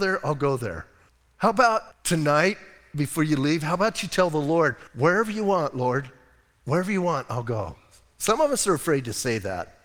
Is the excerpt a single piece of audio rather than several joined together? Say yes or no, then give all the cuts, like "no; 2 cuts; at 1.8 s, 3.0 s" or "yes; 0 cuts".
no; 3 cuts; at 1.1 s, 1.9 s, 4.9 s